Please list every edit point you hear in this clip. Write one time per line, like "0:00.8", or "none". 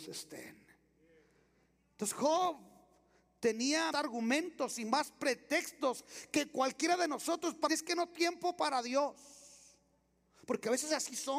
0:03.9
0:07.7
0:08.1